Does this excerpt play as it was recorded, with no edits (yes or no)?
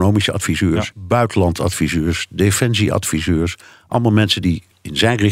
yes